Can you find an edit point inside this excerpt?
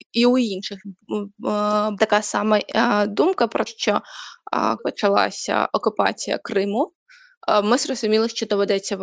yes; 3 cuts; at 2.0 s, 3.7 s, 4.8 s

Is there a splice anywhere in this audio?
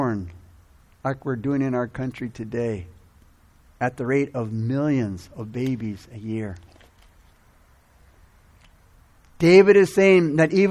no; 0 cuts

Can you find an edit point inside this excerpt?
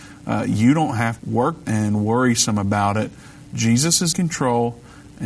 yes; 3 cuts; at 1.2 s, 1.7 s, 4.1 s

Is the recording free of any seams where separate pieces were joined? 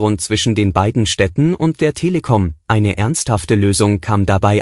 yes; 0 cuts

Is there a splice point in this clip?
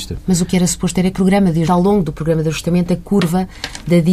yes; 2 cuts; at 1.1 s, 1.7 s

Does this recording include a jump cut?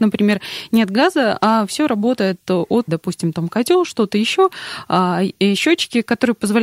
yes; 1 cut; at 2.9 s

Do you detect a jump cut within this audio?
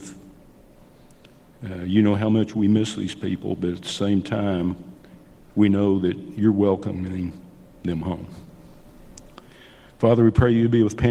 no; 0 cuts

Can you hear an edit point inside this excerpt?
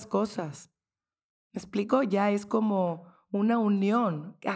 no; 0 cuts

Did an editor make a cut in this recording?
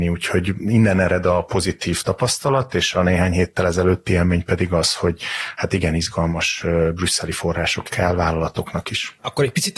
yes; 1 cut; at 7.9 s

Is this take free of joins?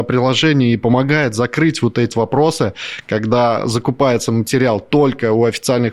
no; 1 cut; at 2.1 s

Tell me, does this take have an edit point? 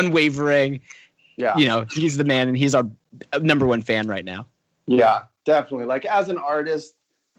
no; 0 cuts

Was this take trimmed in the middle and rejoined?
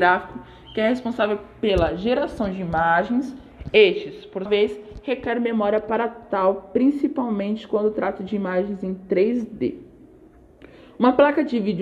yes; 1 cut; at 4.5 s

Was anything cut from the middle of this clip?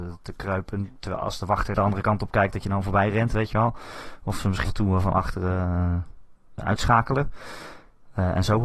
yes; 3 cuts; at 1.7 s, 4.6 s, 6.6 s

